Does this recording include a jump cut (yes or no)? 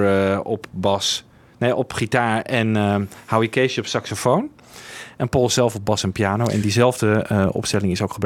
no